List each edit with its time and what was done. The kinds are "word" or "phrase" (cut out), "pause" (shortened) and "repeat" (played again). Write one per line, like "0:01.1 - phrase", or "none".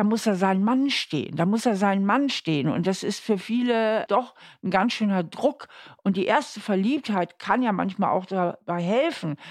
none